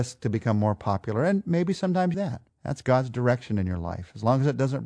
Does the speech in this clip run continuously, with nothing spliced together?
no; 2 cuts; at 2.1 s, 2.5 s

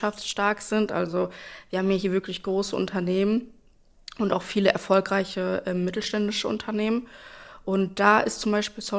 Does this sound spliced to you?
no; 0 cuts

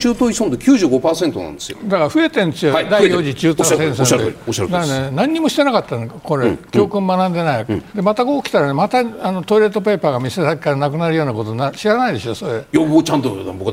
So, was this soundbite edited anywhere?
yes; 1 cut; at 7.9 s

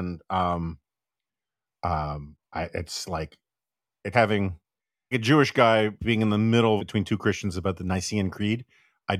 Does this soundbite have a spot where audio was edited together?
yes; 5 cuts; at 2.4 s, 4.1 s, 5.1 s, 6.0 s, 6.8 s

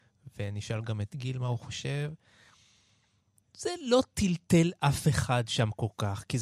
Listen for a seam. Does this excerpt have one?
no; 0 cuts

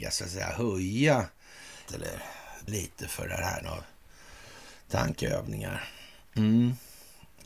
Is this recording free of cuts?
no; 3 cuts; at 1.9 s, 2.7 s, 3.6 s

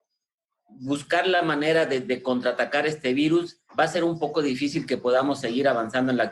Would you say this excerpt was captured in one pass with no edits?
no; 1 cut; at 3.7 s

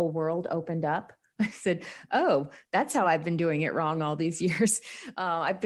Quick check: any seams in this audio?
no; 0 cuts

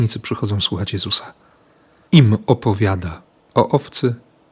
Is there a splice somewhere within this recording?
no; 0 cuts

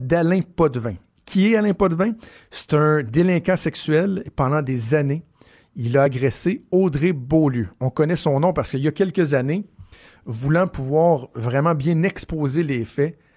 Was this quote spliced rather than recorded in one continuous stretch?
no; 0 cuts

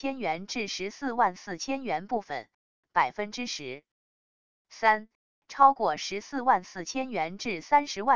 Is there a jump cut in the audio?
no; 0 cuts

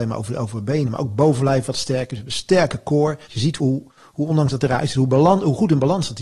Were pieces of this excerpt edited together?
yes; 3 cuts; at 3.2 s, 3.6 s, 3.9 s

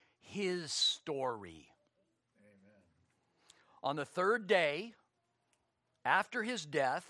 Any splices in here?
no; 0 cuts

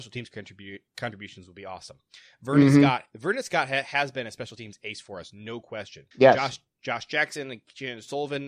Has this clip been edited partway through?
yes; 1 cut; at 6.1 s

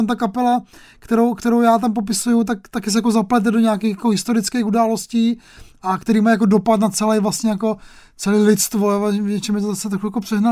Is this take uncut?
yes; 0 cuts

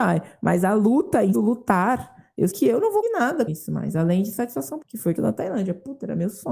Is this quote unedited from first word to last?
no; 6 cuts; at 1.3 s, 2.5 s, 3.0 s, 3.5 s, 4.8 s, 5.2 s

